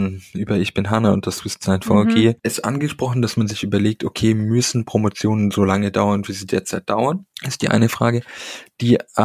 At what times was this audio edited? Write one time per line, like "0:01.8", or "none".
0:02.4
0:07.3